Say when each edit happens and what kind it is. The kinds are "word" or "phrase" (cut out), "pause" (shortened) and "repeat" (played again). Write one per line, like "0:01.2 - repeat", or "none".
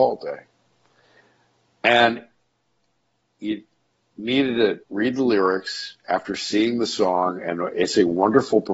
0:04.8 - pause